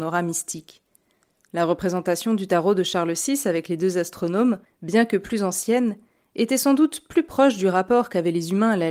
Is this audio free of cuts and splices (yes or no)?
yes